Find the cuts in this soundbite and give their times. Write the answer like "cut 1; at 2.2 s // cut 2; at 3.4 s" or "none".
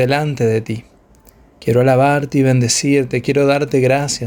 none